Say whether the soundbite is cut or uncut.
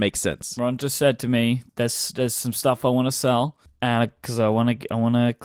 cut